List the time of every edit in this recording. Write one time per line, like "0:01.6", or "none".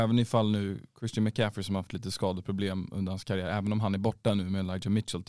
none